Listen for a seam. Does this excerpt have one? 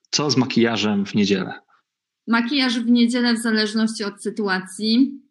no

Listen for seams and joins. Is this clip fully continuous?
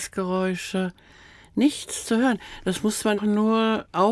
no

